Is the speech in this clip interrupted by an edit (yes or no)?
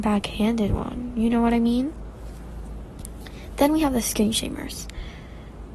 no